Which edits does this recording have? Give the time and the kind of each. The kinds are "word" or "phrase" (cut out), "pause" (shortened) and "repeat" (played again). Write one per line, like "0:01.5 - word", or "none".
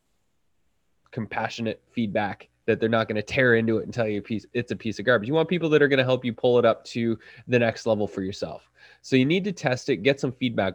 none